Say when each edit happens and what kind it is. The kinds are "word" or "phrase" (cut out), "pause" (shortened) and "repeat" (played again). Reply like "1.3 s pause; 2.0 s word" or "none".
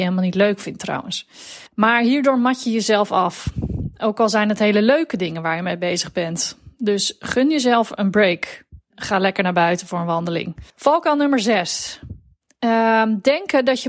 1.7 s pause; 8.9 s word; 10.7 s pause